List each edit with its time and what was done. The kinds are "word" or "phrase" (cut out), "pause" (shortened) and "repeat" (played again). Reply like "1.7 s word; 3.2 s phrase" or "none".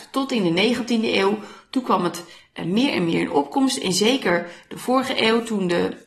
none